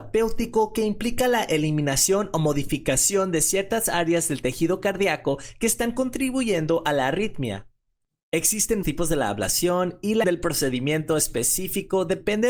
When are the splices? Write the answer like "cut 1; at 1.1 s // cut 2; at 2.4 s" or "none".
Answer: cut 1; at 8.8 s // cut 2; at 10.2 s